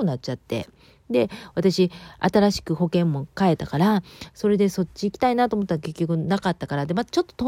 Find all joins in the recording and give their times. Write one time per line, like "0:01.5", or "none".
none